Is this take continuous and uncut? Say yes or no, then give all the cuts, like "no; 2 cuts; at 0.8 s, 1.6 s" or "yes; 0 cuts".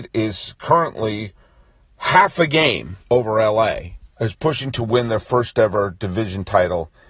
no; 2 cuts; at 3.0 s, 4.1 s